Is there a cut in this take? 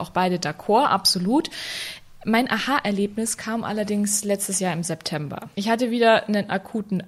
yes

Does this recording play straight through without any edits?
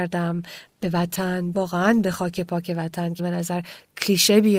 no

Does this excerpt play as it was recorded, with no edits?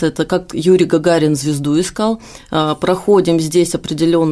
yes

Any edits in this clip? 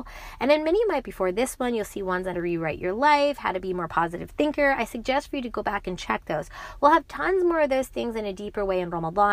yes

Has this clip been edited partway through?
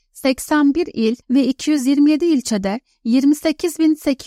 yes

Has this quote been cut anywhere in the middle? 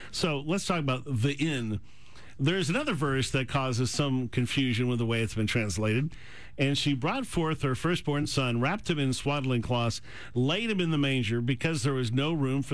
no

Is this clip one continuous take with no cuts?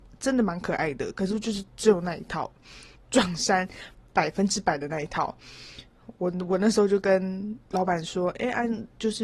no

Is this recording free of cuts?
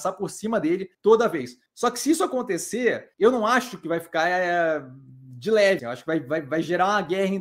no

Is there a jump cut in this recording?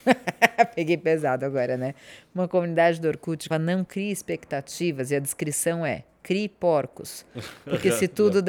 yes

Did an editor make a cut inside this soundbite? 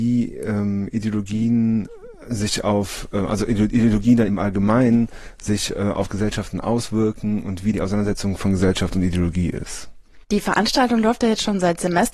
yes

